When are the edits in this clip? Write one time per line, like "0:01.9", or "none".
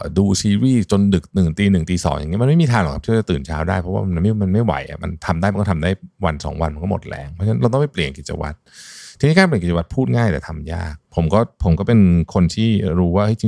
0:11.0